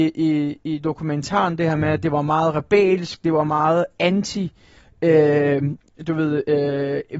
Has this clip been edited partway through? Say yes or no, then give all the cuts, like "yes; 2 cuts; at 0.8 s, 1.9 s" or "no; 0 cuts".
no; 0 cuts